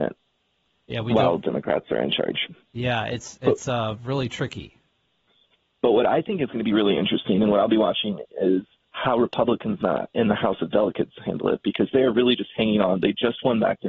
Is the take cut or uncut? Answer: cut